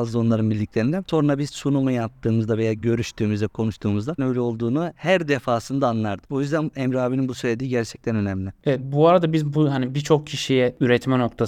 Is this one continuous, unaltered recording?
no; 1 cut; at 4.2 s

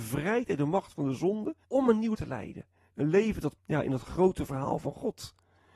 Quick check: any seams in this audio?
yes; 3 cuts; at 1.6 s, 2.1 s, 3.6 s

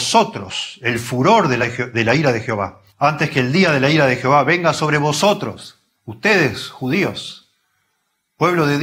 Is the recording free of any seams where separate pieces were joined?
no; 3 cuts; at 1.6 s, 2.9 s, 6.0 s

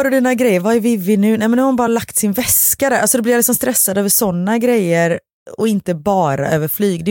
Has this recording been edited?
no; 0 cuts

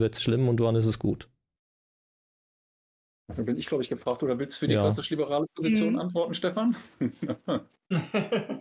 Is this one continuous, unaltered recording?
yes; 0 cuts

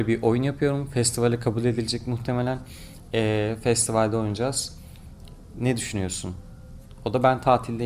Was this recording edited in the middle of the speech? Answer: no; 0 cuts

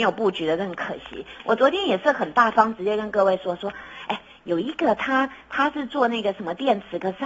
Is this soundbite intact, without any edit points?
yes; 0 cuts

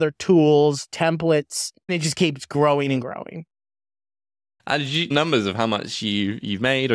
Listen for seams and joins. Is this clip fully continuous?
no; 3 cuts; at 1.9 s, 3.0 s, 5.1 s

